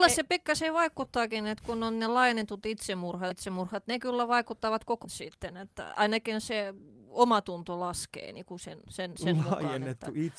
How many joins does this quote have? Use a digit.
3